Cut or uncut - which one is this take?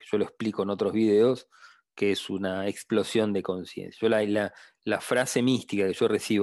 uncut